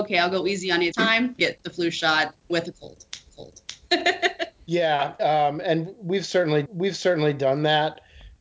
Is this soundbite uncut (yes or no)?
no